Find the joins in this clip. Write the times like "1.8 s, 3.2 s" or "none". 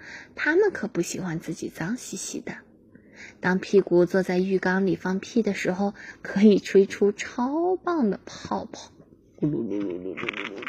none